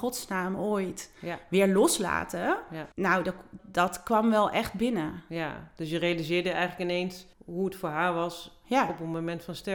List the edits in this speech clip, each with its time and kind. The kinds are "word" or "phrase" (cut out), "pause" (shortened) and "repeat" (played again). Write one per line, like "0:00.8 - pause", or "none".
0:02.9 - pause
0:03.6 - word
0:07.3 - pause